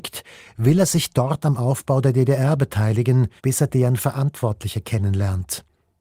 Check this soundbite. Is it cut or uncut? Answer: cut